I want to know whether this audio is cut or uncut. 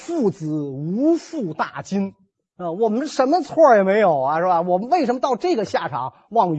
uncut